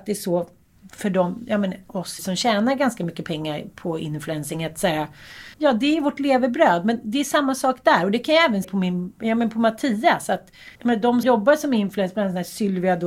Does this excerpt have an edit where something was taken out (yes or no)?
yes